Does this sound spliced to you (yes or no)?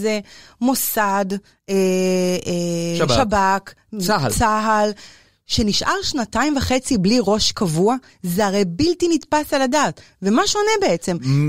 no